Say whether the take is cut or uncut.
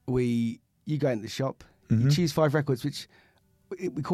uncut